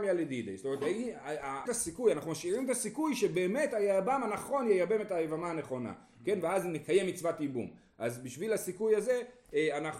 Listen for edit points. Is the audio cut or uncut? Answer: cut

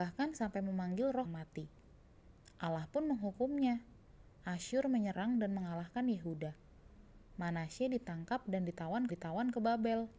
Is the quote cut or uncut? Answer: cut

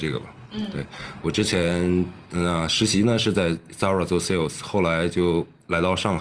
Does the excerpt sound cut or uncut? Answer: uncut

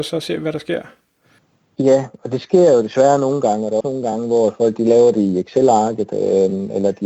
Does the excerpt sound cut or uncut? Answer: cut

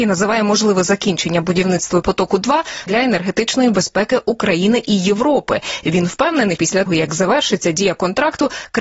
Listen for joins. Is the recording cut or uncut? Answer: cut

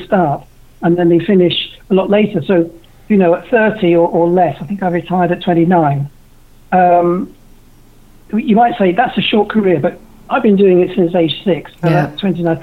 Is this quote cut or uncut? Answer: uncut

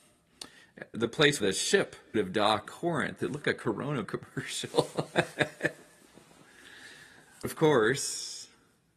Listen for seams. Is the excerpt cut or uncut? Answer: cut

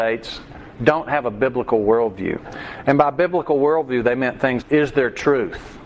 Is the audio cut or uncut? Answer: cut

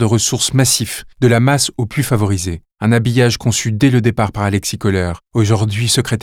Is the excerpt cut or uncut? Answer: cut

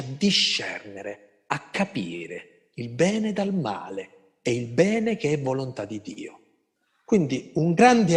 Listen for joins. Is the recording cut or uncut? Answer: uncut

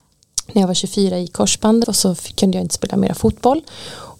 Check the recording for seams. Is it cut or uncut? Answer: cut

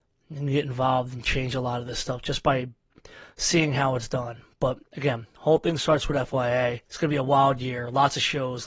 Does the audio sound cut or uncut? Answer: cut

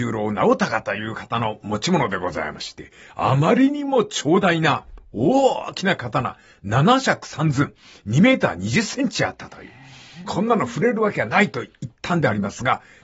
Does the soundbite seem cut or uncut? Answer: uncut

